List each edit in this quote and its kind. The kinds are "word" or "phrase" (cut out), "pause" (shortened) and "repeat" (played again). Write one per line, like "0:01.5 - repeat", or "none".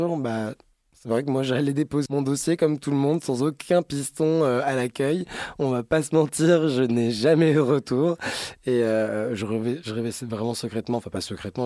0:02.1 - word